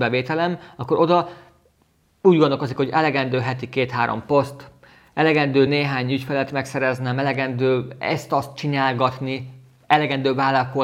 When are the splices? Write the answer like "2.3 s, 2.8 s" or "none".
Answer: none